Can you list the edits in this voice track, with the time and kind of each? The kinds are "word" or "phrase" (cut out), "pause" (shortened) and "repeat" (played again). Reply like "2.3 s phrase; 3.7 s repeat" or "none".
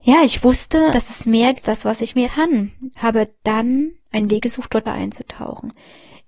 0.9 s word; 1.5 s phrase; 2.2 s word; 3.0 s word; 4.0 s pause; 4.8 s word